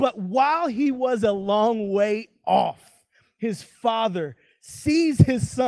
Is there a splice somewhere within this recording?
no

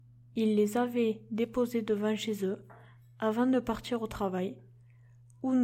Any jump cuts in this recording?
no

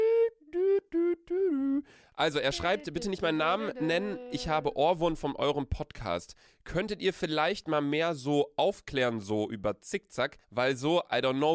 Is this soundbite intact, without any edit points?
no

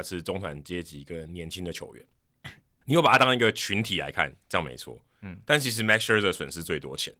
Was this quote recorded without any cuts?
yes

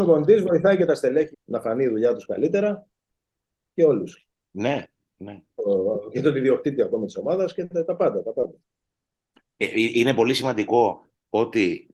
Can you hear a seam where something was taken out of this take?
yes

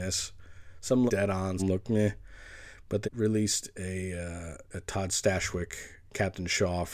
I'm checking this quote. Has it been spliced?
yes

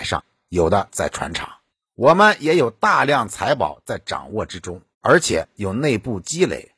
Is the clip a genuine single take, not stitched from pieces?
no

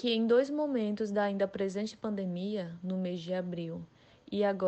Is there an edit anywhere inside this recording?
no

